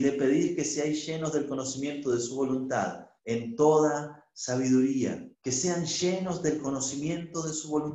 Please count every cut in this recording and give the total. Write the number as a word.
two